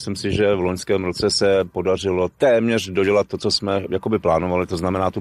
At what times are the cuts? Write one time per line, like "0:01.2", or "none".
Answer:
none